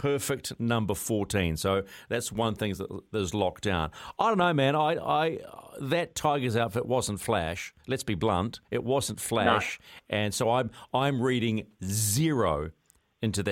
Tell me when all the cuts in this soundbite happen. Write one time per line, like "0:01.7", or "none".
0:07.8
0:08.6